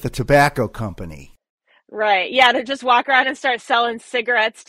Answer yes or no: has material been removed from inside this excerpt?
no